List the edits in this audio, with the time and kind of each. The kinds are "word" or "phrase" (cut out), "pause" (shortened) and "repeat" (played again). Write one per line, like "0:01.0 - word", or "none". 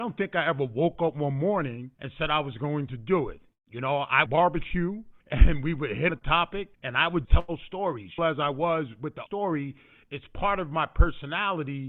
0:01.9 - pause
0:04.3 - phrase
0:05.2 - pause
0:06.1 - word
0:06.7 - pause
0:07.2 - word
0:08.2 - phrase
0:09.3 - word